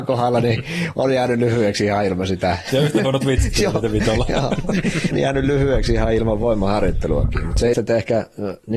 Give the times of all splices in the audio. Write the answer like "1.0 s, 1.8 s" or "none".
5.1 s, 7.7 s